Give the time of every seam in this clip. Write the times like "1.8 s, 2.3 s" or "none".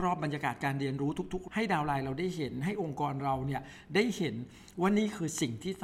1.5 s

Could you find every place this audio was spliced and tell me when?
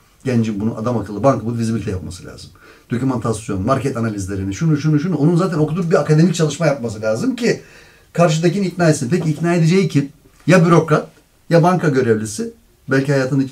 none

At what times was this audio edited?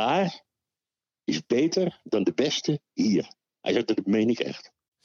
none

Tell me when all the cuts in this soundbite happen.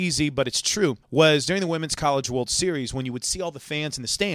1.0 s

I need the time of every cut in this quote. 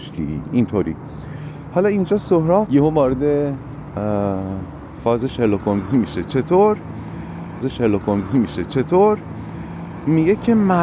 2.7 s, 7.6 s

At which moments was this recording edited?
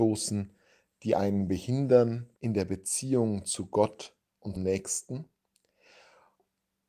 2.4 s, 4.6 s

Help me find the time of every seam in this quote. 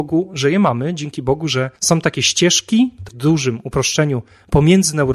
1.8 s, 3.1 s

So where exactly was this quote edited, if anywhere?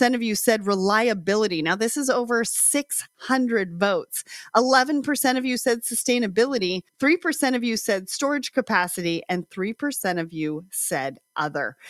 6.9 s

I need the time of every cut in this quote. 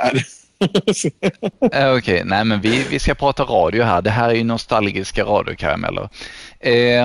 none

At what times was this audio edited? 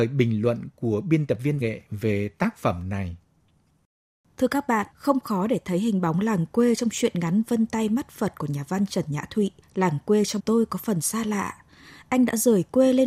1.6 s, 4.9 s, 9.6 s, 10.4 s

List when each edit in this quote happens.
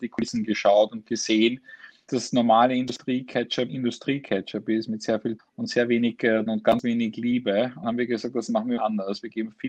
2.1 s, 3.7 s, 5.4 s, 6.5 s, 7.8 s, 8.8 s

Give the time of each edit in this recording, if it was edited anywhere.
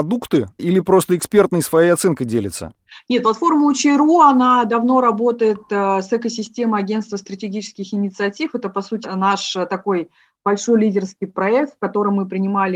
none

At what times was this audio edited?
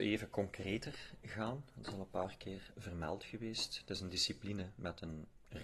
none

